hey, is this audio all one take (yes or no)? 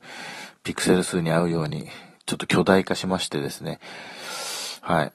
yes